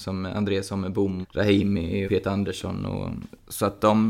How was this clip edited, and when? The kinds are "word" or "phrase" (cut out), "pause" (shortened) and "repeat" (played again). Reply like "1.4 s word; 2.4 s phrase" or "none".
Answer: 1.2 s word; 2.0 s word